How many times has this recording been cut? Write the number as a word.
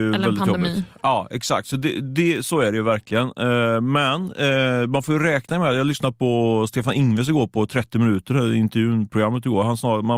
zero